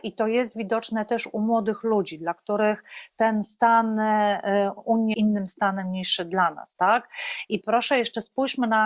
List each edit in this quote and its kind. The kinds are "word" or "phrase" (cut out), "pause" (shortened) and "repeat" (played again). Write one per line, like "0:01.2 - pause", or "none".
0:05.1 - phrase
0:07.6 - word

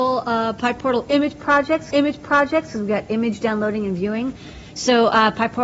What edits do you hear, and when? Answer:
0:01.9 - repeat

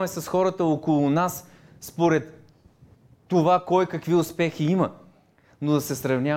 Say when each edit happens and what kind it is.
none

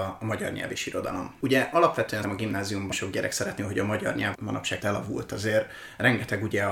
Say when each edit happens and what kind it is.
0:02.2 - word
0:02.9 - word
0:03.6 - word
0:04.3 - word
0:04.8 - word

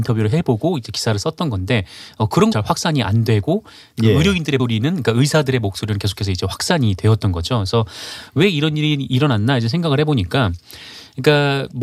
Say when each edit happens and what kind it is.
0:02.5 - word
0:04.6 - word

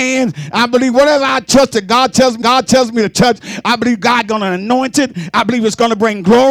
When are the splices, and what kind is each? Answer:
0:02.4 - repeat

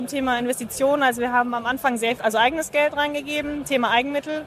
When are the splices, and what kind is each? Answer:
0:02.2 - phrase

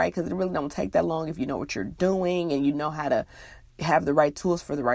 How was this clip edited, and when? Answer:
none

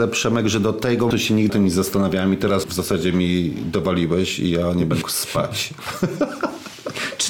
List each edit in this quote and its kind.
0:01.1 - word
0:01.5 - word
0:02.6 - word
0:05.0 - word

